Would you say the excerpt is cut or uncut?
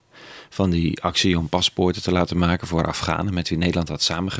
uncut